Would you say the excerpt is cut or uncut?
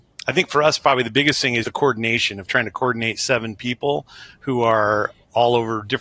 cut